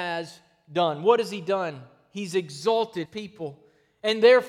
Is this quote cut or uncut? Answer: cut